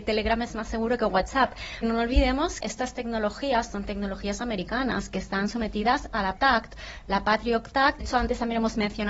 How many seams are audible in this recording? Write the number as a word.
four